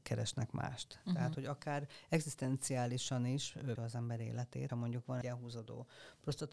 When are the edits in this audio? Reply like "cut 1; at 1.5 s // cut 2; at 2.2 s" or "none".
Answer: cut 1; at 3.8 s // cut 2; at 4.7 s // cut 3; at 5.2 s